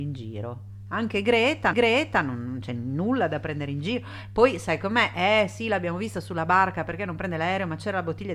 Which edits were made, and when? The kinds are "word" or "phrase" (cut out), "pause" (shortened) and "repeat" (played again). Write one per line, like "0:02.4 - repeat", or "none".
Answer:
0:01.7 - repeat